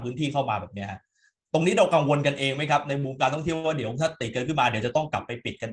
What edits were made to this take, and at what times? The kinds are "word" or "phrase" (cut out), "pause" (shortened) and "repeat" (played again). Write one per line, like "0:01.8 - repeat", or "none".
none